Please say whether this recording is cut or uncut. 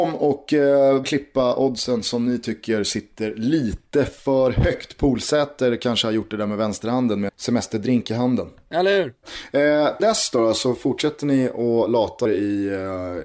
cut